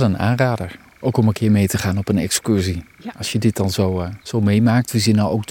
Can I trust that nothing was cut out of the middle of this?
no; 1 cut; at 4.2 s

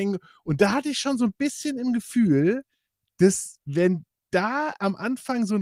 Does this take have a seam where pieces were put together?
no; 0 cuts

